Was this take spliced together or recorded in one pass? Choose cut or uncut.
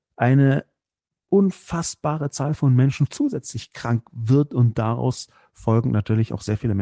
uncut